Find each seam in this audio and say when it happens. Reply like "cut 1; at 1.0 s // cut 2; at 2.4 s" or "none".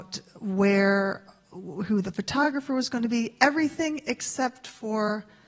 none